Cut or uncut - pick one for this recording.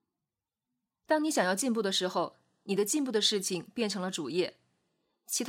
uncut